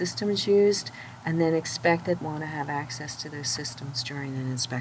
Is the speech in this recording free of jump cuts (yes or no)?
no